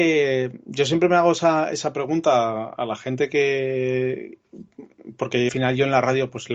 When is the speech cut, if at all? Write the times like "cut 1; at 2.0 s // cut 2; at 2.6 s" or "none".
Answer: cut 1; at 5.5 s